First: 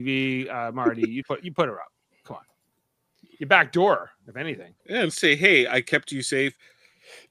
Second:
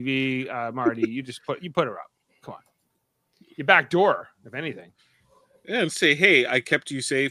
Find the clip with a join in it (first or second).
first